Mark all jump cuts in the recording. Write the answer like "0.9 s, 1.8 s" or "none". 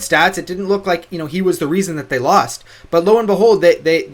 none